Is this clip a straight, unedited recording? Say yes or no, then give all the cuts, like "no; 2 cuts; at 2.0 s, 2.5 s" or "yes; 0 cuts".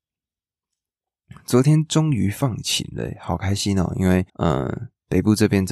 no; 1 cut; at 4.3 s